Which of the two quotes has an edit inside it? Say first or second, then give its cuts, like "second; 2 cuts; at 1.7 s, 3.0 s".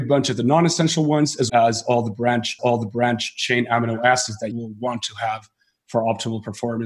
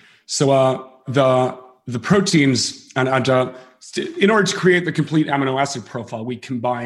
first; 3 cuts; at 1.5 s, 2.6 s, 4.5 s